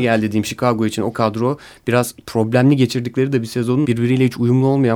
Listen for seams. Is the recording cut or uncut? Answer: cut